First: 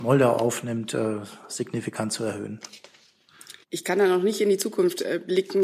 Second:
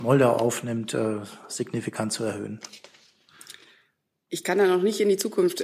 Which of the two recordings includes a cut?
first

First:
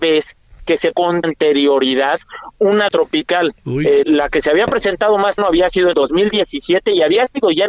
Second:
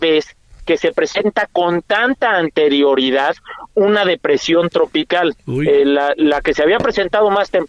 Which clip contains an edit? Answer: first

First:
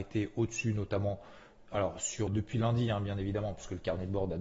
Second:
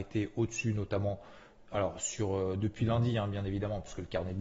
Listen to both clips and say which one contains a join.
first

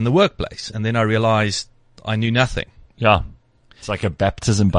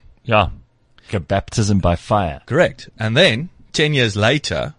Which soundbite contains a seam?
second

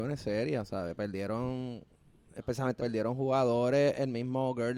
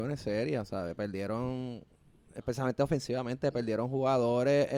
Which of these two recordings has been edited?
first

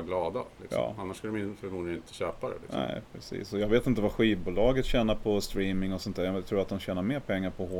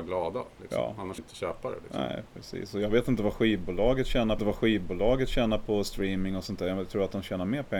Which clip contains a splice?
second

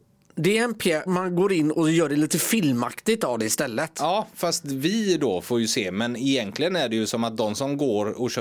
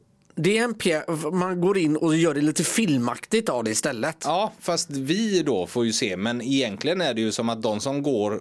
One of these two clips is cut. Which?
first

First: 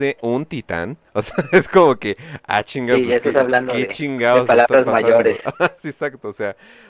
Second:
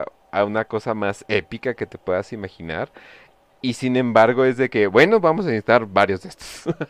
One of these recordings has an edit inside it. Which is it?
first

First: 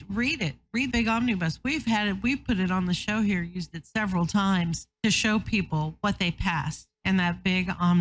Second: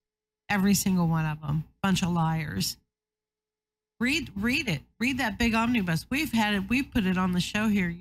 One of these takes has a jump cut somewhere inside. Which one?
first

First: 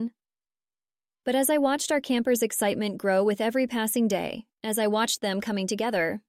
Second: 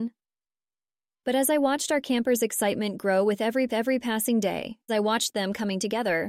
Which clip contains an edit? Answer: second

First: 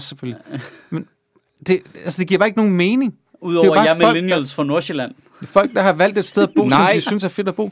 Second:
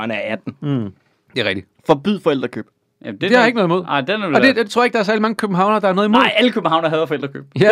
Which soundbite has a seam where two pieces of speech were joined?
second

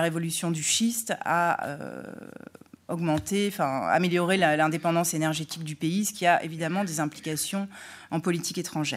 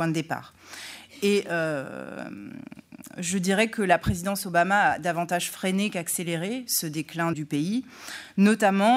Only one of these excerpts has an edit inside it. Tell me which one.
second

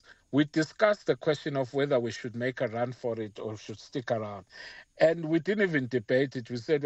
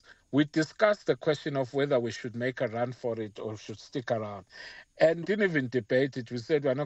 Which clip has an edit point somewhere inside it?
second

